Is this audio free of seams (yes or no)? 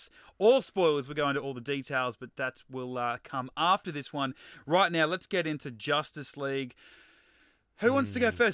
yes